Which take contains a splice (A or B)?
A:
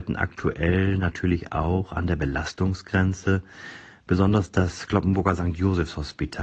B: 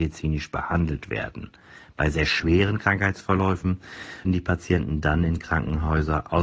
B